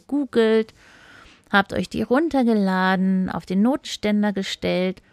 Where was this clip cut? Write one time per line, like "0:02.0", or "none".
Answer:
none